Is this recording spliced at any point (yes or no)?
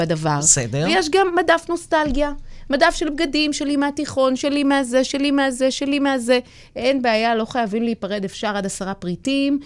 no